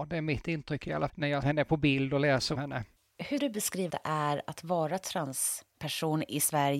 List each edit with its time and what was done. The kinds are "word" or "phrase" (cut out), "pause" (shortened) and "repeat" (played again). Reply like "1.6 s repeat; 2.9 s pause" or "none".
1.1 s word; 1.4 s word; 2.5 s word; 3.4 s word; 3.9 s word